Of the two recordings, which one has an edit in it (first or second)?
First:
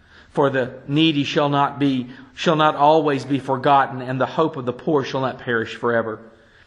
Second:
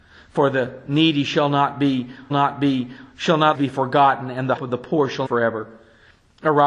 second